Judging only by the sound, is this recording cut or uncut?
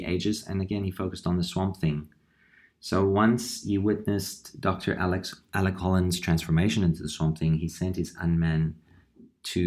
uncut